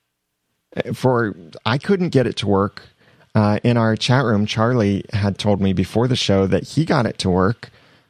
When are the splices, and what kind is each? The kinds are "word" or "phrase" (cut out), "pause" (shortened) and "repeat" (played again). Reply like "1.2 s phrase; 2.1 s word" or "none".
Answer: none